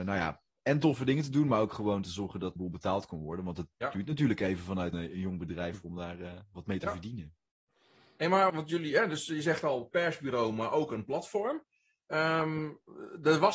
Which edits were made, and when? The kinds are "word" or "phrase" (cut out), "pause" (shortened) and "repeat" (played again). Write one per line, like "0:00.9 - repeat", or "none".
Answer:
0:02.6 - phrase
0:04.9 - word
0:08.5 - word